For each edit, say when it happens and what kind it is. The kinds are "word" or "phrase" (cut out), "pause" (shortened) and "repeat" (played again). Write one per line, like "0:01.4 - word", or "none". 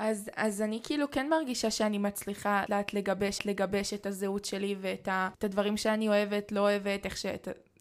0:02.7 - word
0:03.4 - repeat